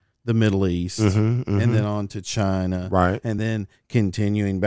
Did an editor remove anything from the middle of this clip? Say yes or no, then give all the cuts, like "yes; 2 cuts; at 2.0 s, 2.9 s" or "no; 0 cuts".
no; 0 cuts